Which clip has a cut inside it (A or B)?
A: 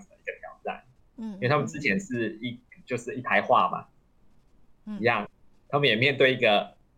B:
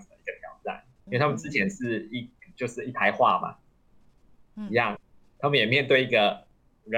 B